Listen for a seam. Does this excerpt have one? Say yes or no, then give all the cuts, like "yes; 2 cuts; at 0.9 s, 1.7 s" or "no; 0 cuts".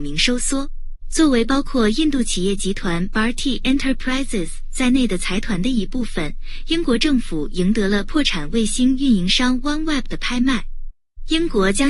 yes; 1 cut; at 1.0 s